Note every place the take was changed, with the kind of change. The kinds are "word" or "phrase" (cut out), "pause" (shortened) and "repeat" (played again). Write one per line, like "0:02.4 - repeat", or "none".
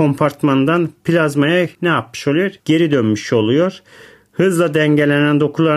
0:01.7 - pause
0:02.6 - pause